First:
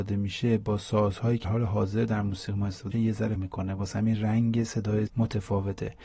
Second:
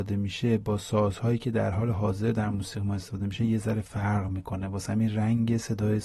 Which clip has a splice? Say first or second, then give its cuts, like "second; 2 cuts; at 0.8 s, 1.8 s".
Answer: first; 4 cuts; at 1.4 s, 2.9 s, 3.4 s, 5.1 s